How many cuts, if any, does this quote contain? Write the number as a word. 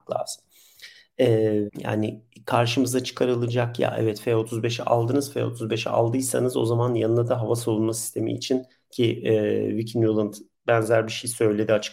one